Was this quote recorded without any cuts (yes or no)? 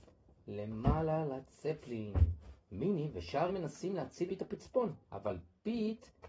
no